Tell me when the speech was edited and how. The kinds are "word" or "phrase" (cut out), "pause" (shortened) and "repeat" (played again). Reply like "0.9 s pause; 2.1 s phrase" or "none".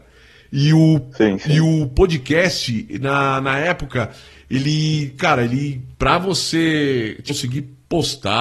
none